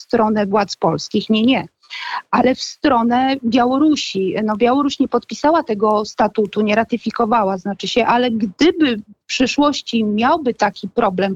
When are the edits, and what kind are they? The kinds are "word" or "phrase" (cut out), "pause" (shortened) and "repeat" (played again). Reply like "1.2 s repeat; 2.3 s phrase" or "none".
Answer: none